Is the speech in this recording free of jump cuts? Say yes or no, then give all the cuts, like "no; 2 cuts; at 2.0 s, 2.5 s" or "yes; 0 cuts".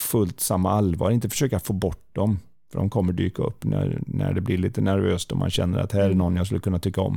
yes; 0 cuts